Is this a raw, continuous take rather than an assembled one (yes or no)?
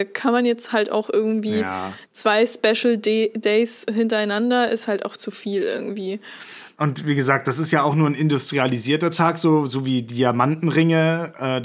yes